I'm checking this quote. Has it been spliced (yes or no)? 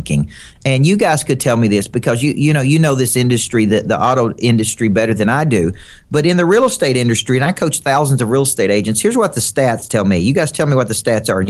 no